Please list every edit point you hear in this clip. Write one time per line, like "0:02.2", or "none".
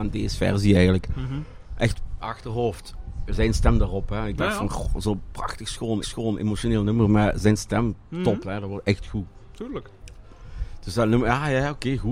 0:02.2
0:06.0

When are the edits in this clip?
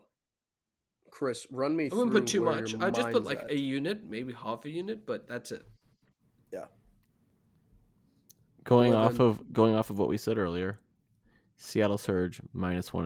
none

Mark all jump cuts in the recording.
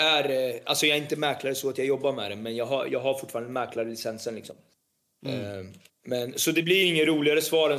0:05.9

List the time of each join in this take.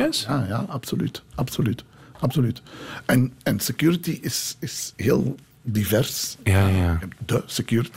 0:04.9

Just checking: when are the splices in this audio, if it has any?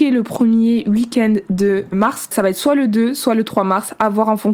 0:01.9
0:02.3

